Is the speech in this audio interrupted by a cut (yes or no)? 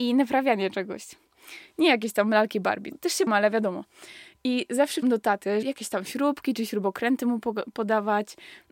yes